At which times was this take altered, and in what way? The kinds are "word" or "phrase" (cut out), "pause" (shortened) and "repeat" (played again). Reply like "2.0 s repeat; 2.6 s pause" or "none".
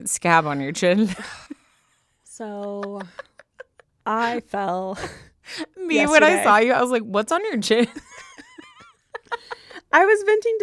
1.5 s pause; 3.8 s pause